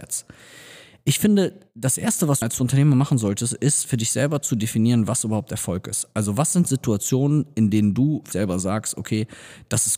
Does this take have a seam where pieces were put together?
yes; 2 cuts; at 2.4 s, 8.3 s

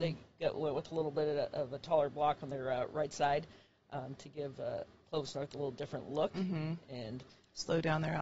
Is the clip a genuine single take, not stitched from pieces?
yes; 0 cuts

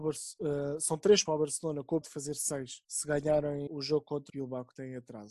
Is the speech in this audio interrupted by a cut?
yes; 5 cuts; at 1.3 s, 2.0 s, 2.8 s, 3.7 s, 4.3 s

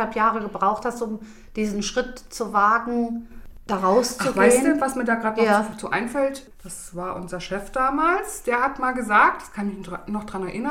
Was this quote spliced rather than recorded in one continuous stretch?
no; 0 cuts

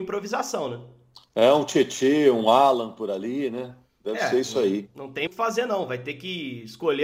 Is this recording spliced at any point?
yes; 1 cut; at 5.3 s

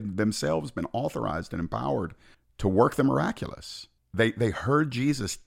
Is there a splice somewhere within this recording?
yes; 2 cuts; at 2.3 s, 4.0 s

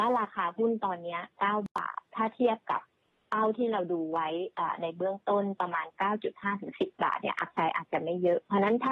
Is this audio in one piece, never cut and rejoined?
yes; 0 cuts

